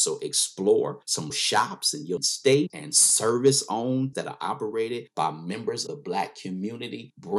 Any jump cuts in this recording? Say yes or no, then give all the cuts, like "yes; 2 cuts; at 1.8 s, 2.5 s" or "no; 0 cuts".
yes; 5 cuts; at 1.3 s, 2.2 s, 2.7 s, 4.1 s, 5.9 s